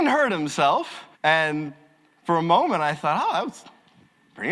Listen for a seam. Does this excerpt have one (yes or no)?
yes